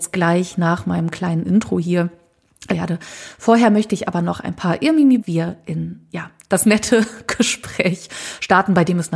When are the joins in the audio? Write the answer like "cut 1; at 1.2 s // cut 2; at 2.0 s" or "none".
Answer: cut 1; at 2.7 s // cut 2; at 5.2 s